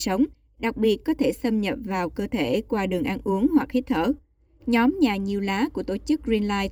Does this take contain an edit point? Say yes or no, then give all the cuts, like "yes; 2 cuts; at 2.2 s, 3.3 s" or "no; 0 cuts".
no; 0 cuts